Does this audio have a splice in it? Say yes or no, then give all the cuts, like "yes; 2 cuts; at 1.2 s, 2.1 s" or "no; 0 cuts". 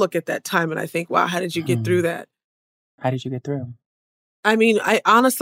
no; 0 cuts